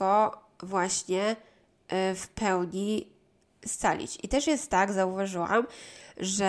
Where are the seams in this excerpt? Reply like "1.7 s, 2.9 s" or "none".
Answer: none